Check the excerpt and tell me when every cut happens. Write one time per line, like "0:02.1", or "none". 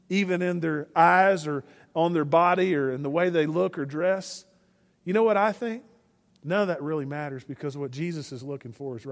none